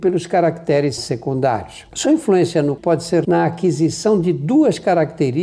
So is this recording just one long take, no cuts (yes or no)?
no